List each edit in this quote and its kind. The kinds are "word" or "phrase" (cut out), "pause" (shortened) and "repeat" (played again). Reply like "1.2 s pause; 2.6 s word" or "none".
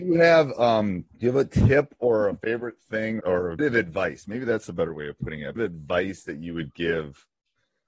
1.1 s pause; 3.2 s word; 3.6 s word; 5.6 s phrase